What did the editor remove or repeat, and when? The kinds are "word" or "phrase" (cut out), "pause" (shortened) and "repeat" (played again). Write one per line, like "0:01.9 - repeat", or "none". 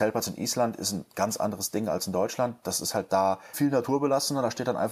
0:03.5 - word